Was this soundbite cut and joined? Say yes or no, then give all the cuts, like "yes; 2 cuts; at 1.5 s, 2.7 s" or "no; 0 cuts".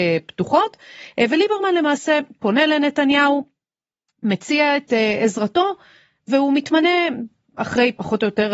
no; 0 cuts